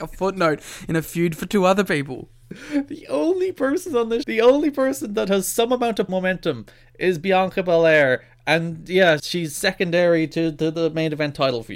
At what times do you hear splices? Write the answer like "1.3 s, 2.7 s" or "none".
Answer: 4.2 s, 6.1 s, 9.2 s